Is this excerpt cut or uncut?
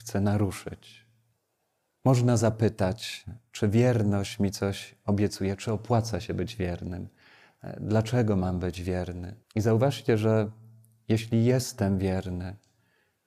cut